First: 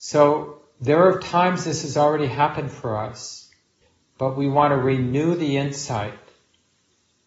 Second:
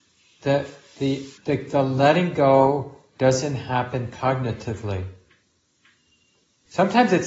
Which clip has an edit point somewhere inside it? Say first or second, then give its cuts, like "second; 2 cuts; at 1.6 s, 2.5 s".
second; 1 cut; at 1.4 s